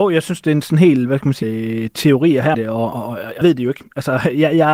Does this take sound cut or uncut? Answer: cut